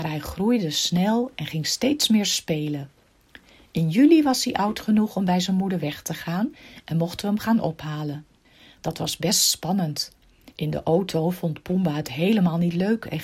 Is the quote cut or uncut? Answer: uncut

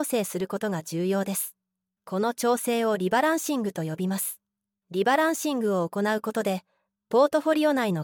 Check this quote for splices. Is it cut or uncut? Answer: uncut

